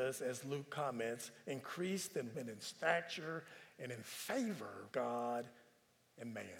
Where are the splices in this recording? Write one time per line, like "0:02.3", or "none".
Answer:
0:02.3
0:04.9